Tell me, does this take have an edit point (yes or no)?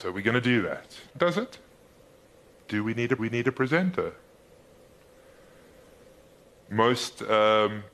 yes